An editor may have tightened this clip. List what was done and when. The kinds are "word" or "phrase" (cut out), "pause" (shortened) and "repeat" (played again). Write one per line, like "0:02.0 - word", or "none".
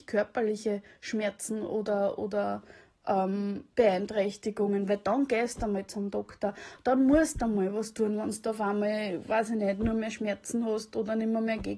0:03.7 - pause